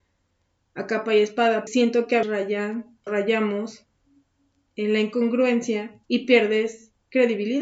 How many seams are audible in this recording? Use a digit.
4